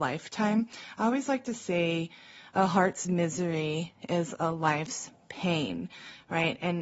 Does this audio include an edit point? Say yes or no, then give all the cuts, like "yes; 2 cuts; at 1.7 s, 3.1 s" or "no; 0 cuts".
no; 0 cuts